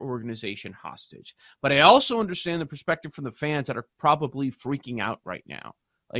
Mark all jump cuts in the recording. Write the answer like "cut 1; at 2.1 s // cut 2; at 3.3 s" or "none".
none